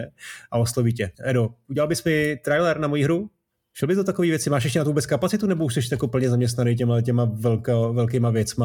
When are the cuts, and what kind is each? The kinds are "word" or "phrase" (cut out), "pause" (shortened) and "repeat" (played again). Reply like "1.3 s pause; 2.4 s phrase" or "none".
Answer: 1.1 s pause